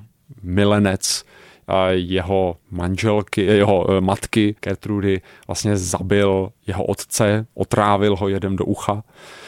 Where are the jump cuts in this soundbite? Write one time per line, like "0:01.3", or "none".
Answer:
0:02.6
0:04.6